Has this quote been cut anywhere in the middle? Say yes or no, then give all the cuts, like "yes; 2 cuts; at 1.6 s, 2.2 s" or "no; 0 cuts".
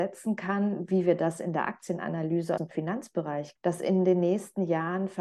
yes; 2 cuts; at 2.6 s, 3.6 s